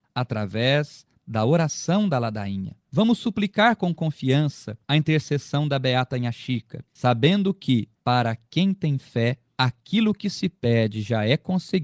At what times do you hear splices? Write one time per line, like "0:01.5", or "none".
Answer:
0:04.8
0:06.9